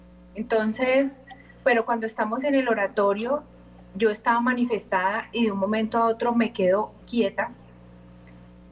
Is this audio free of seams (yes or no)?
no